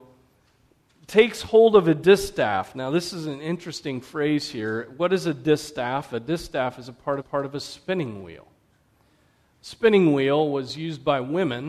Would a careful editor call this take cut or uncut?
cut